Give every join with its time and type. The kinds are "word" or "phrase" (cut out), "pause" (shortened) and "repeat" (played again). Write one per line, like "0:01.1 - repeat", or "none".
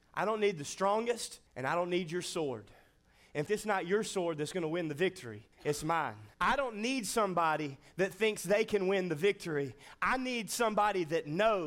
0:01.5 - pause
0:03.5 - word
0:05.5 - pause
0:06.3 - pause